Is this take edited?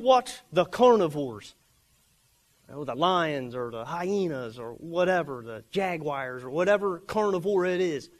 no; 0 cuts

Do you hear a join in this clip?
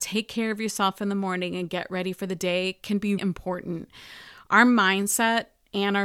yes; 1 cut; at 3.2 s

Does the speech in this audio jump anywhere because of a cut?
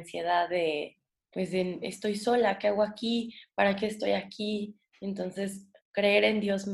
no; 0 cuts

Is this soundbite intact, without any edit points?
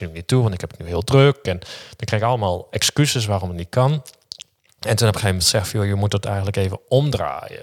yes; 0 cuts

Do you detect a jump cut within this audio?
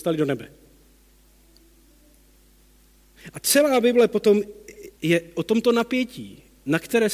yes; 1 cut; at 4.9 s

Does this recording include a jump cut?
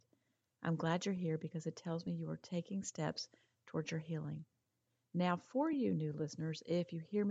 no; 0 cuts

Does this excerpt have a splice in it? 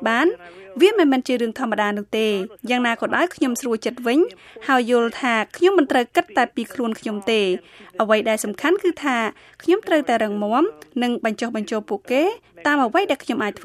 no; 0 cuts

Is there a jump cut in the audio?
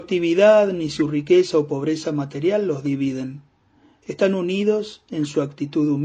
no; 0 cuts

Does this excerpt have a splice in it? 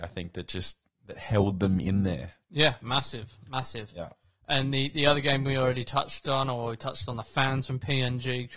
no; 0 cuts

